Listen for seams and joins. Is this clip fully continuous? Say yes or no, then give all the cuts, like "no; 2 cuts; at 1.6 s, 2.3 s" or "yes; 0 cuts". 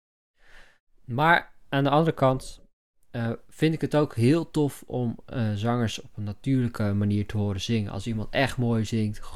yes; 0 cuts